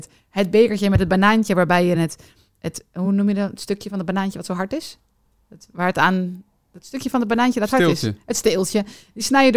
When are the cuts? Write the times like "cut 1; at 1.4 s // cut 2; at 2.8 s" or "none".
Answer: none